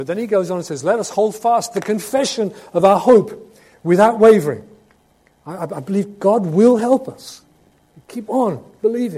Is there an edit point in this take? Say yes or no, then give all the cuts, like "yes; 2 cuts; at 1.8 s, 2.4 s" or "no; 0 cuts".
no; 0 cuts